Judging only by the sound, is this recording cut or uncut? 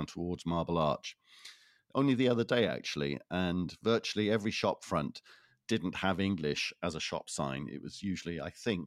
uncut